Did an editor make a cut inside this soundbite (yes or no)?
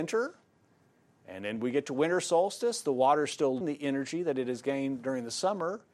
yes